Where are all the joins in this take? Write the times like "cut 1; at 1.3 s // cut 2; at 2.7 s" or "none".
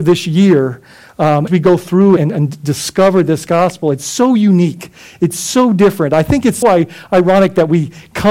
cut 1; at 1.5 s // cut 2; at 2.2 s // cut 3; at 6.6 s